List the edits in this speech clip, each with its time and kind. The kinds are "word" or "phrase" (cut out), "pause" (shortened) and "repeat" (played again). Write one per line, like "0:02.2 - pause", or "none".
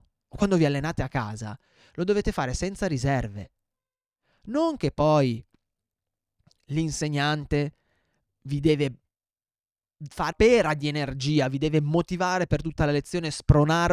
0:10.3 - word